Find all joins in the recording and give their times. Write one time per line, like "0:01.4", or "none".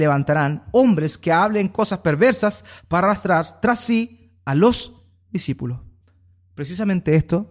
none